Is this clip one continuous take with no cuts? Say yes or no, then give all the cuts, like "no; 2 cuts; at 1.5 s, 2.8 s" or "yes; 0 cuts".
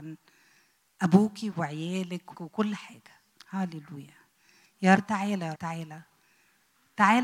no; 5 cuts; at 1.5 s, 2.3 s, 3.4 s, 5.0 s, 5.5 s